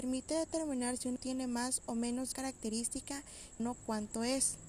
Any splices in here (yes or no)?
yes